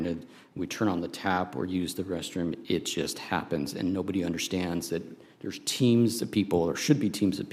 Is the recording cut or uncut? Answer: uncut